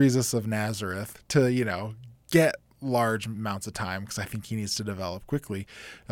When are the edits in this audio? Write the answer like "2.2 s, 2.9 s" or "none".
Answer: none